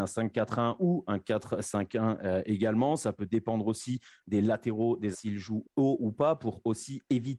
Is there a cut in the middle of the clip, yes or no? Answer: yes